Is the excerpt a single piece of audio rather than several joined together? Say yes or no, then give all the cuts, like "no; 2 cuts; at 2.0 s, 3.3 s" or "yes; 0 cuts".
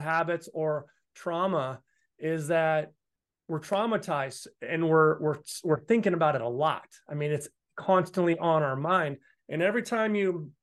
yes; 0 cuts